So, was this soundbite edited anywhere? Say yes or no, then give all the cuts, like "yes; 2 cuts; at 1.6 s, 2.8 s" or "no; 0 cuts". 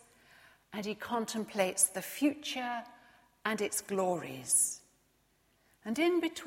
no; 0 cuts